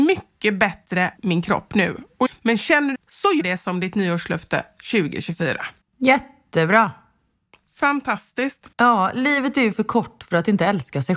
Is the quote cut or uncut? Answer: cut